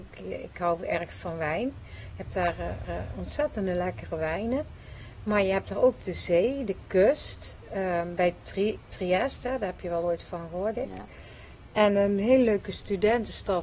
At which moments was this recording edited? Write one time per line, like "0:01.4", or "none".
0:02.8
0:10.7
0:11.9